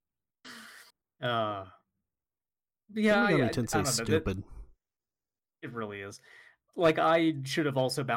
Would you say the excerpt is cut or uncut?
cut